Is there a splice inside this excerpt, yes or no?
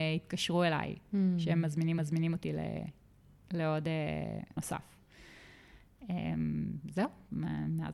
yes